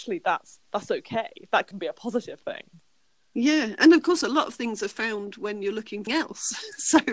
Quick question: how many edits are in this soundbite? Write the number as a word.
two